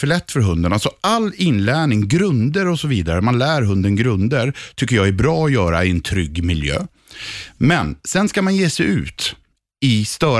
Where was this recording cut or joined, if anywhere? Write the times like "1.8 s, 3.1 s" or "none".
none

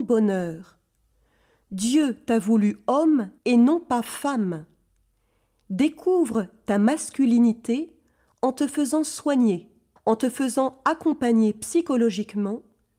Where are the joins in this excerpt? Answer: 3.4 s, 10.0 s

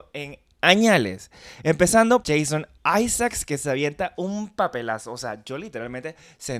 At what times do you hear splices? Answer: 2.2 s

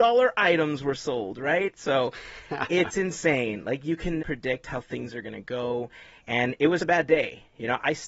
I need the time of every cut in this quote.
4.2 s, 6.8 s

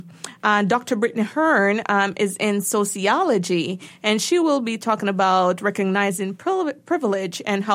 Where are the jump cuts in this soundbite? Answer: none

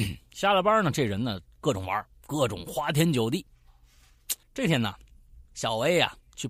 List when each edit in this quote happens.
2.1 s, 4.4 s, 5.4 s

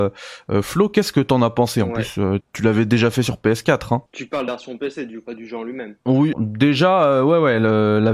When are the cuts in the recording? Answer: 2.4 s, 4.1 s, 4.5 s, 5.3 s, 6.3 s

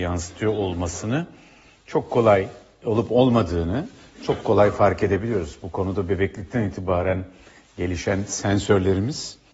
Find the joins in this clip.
none

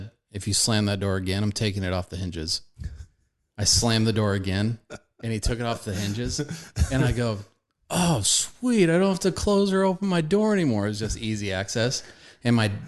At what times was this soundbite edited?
none

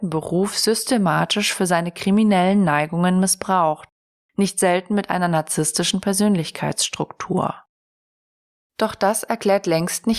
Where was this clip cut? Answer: none

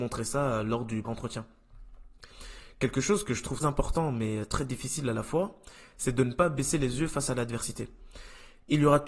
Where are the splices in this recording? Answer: 1.0 s, 3.6 s

